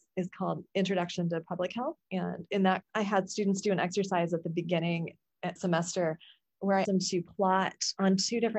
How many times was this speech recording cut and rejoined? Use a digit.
3